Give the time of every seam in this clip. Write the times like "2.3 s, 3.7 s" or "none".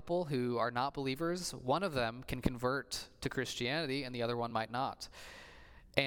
none